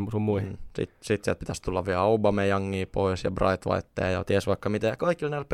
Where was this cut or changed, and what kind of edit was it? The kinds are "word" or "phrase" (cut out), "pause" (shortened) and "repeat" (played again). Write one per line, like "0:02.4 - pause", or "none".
none